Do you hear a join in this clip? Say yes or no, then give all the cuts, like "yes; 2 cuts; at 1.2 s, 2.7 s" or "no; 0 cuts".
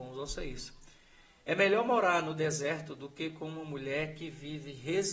no; 0 cuts